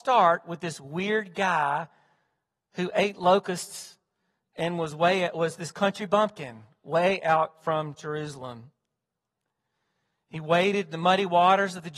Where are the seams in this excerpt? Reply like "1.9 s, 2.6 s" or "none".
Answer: none